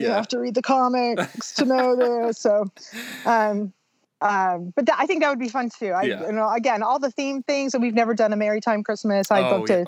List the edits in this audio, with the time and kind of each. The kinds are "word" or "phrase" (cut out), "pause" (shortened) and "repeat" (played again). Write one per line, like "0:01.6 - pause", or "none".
none